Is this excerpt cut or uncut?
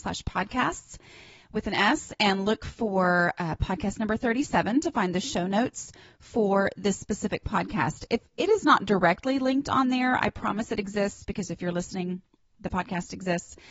uncut